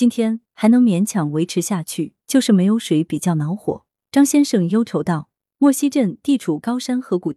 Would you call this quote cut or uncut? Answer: uncut